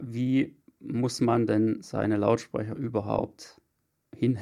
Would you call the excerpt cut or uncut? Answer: uncut